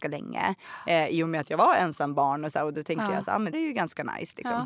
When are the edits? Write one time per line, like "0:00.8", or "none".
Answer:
0:03.5